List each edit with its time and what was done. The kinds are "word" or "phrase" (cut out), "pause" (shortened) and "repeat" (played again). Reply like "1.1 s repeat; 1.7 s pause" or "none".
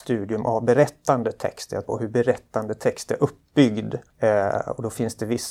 1.8 s word; 4.1 s pause